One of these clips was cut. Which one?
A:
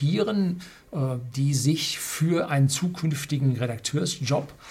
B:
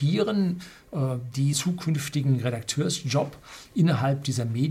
B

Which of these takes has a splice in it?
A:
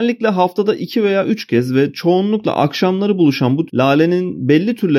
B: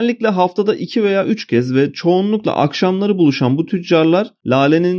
A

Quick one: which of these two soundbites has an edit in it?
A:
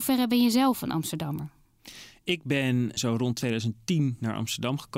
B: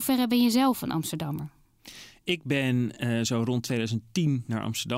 A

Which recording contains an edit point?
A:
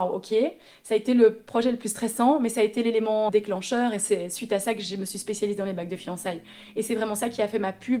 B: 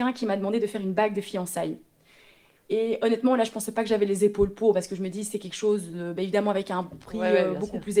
A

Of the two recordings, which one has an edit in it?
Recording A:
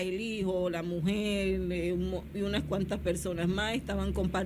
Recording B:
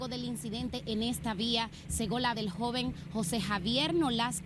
B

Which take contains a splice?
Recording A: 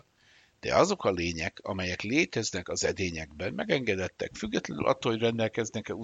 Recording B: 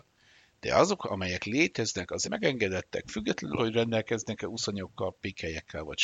B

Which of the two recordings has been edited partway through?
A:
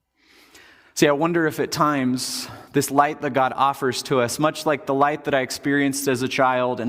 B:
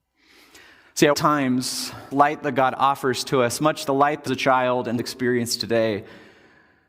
B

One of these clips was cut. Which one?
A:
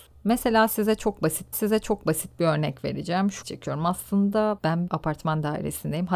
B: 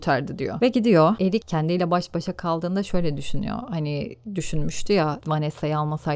A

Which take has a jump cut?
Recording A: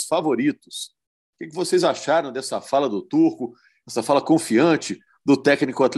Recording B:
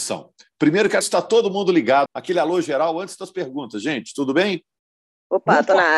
B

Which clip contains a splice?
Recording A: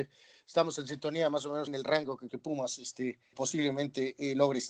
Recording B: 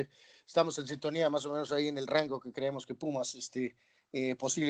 A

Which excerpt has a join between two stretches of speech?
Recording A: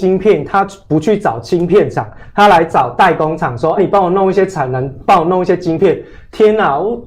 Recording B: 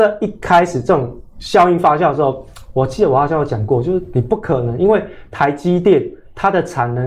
A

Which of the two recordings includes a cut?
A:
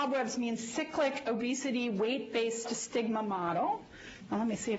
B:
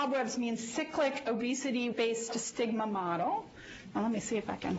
B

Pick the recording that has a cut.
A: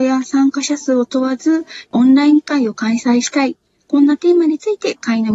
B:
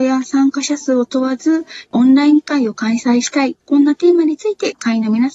B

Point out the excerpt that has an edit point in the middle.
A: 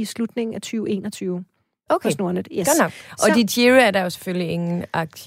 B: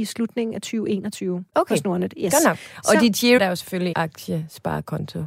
B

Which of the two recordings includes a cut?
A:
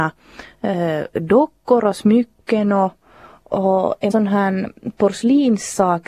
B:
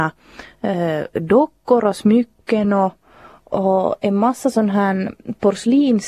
A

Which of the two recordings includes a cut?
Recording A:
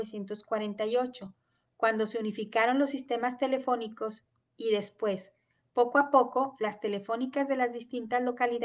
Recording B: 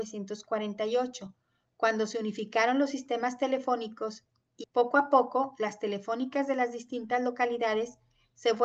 B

